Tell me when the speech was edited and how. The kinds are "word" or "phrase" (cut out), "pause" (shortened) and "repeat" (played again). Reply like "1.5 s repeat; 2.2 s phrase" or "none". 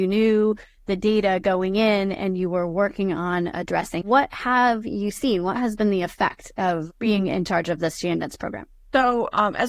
4.0 s word